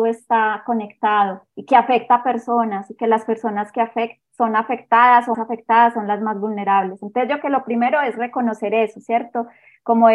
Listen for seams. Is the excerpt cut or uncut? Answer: cut